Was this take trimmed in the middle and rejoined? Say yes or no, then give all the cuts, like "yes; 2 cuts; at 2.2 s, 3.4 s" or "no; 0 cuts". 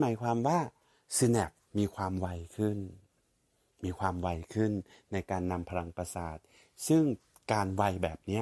no; 0 cuts